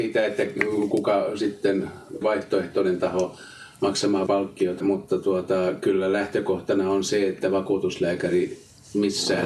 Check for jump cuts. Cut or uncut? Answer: cut